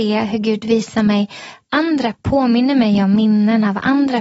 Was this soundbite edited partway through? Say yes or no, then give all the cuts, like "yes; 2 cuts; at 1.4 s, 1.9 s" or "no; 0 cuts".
yes; 1 cut; at 2.1 s